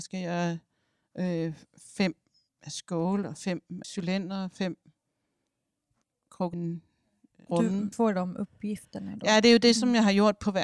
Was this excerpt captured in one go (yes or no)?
no